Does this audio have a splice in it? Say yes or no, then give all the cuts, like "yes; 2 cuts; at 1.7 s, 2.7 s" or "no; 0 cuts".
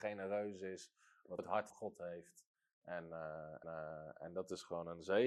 yes; 3 cuts; at 1.4 s, 1.7 s, 3.6 s